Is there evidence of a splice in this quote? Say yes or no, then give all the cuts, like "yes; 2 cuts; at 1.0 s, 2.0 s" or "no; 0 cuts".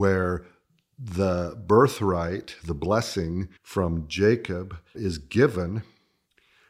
yes; 2 cuts; at 3.6 s, 4.9 s